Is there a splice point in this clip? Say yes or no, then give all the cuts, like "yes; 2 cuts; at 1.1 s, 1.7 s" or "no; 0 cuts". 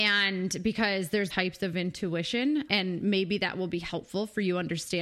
yes; 2 cuts; at 1.3 s, 2.7 s